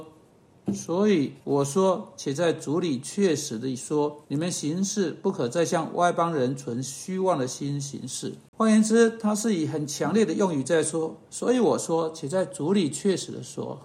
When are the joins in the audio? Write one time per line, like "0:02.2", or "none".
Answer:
0:01.4
0:04.2
0:08.5